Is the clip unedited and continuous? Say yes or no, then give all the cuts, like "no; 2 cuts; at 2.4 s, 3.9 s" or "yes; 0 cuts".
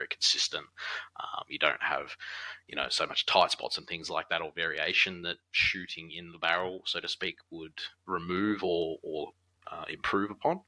yes; 0 cuts